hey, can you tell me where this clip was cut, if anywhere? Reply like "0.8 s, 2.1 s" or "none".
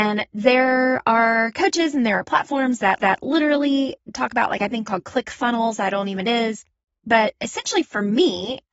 3.0 s, 4.8 s, 6.2 s